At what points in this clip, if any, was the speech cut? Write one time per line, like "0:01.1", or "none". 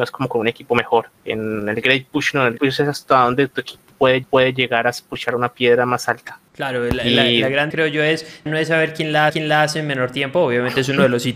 0:01.2
0:02.6
0:04.2
0:06.5
0:07.7
0:08.5
0:09.3